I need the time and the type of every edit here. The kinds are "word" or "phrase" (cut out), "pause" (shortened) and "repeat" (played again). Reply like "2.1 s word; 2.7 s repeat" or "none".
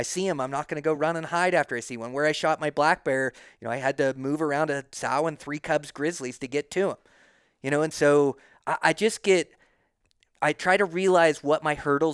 none